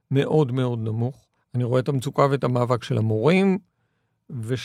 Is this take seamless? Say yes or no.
no